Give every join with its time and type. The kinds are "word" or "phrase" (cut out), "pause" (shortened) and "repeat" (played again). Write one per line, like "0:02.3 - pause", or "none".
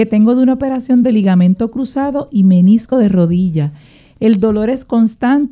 none

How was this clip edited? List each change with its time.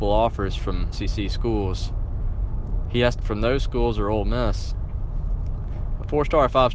0:00.9 - word
0:03.2 - word

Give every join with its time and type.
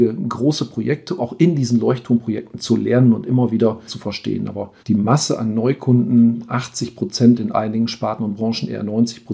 0:01.2 - word
0:03.9 - phrase
0:04.8 - pause

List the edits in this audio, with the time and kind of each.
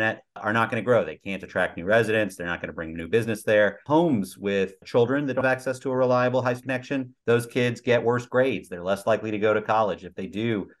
0:04.8 - word
0:05.4 - word
0:06.6 - word
0:07.2 - pause

